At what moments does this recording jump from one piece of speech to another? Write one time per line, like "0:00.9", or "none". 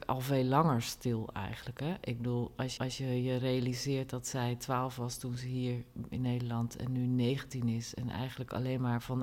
0:02.8
0:06.1